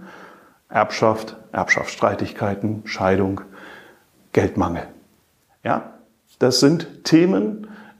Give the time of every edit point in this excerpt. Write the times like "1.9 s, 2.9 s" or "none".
none